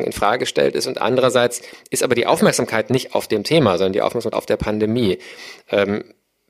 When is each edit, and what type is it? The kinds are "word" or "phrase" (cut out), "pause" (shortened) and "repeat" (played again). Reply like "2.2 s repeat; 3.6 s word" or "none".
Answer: 4.3 s word